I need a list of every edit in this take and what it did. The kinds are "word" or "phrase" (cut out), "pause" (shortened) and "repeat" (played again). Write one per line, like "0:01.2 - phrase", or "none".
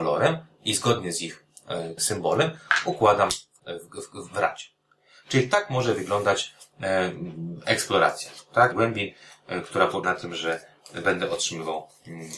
0:02.0 - word
0:03.6 - word
0:08.7 - word
0:10.0 - word